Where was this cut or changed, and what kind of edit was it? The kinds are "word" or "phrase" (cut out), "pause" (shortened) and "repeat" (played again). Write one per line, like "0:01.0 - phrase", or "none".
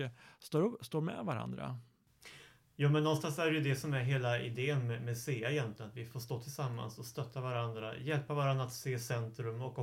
none